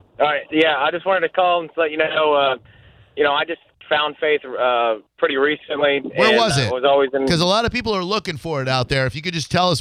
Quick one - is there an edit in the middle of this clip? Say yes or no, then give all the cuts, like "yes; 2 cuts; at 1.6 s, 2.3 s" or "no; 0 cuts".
no; 0 cuts